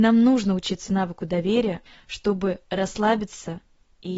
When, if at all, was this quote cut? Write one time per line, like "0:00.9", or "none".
0:01.9